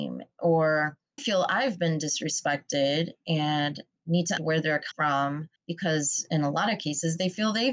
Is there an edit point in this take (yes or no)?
yes